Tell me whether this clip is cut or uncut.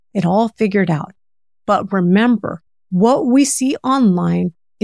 uncut